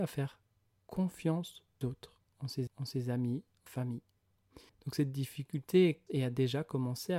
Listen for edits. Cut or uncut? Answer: cut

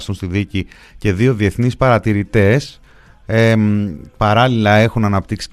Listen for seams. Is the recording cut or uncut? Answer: uncut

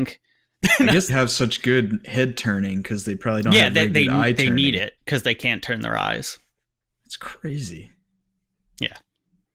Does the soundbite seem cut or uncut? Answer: cut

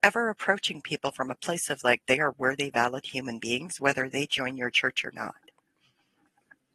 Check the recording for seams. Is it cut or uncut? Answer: uncut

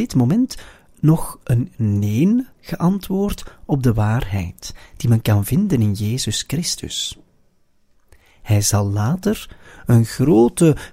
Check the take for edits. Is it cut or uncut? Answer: uncut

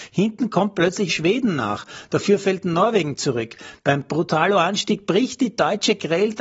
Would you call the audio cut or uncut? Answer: cut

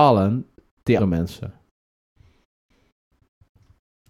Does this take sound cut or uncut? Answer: cut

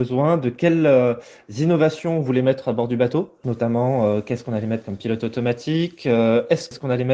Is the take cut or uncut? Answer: uncut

